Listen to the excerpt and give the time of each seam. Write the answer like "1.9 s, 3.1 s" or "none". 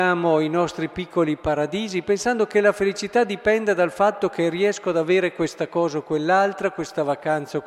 none